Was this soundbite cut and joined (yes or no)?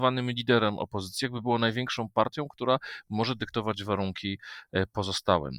no